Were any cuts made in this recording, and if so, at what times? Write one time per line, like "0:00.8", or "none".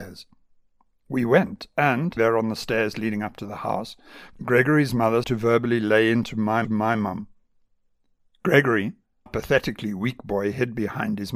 0:02.2
0:05.2
0:06.6
0:09.3